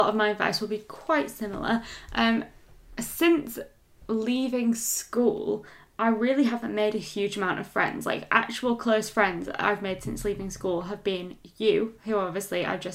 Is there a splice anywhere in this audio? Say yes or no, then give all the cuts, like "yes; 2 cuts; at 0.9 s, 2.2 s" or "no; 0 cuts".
no; 0 cuts